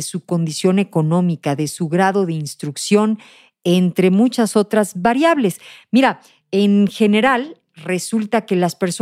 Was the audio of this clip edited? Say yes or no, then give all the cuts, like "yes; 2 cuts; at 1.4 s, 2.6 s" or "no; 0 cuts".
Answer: no; 0 cuts